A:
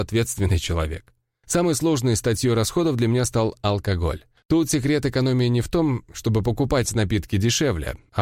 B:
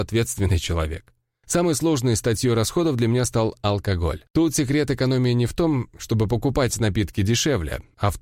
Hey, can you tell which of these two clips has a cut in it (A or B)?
B